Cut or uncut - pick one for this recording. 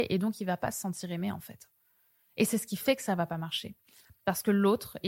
uncut